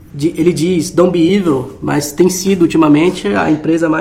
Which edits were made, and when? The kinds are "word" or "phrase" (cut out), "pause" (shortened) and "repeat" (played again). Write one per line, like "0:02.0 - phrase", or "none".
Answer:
none